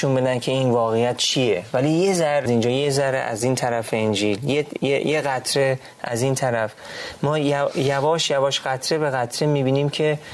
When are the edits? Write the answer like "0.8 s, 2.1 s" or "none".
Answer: 2.5 s